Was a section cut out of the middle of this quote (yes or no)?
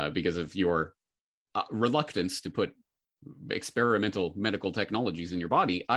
no